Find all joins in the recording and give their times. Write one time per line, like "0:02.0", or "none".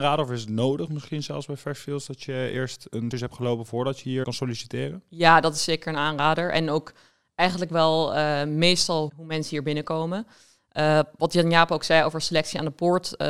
0:03.1
0:04.2
0:09.1